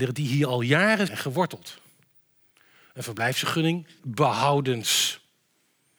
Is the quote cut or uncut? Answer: cut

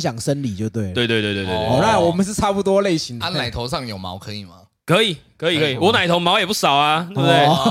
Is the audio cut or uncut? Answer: cut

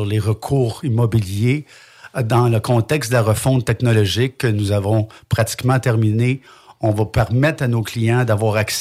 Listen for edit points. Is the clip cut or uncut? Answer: uncut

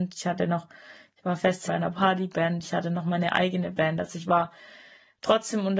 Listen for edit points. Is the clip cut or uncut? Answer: cut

